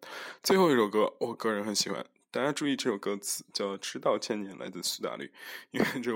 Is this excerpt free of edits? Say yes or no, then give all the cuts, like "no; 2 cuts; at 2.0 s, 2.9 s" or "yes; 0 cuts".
yes; 0 cuts